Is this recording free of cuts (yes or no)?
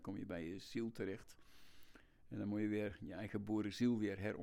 yes